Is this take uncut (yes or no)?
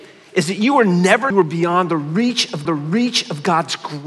no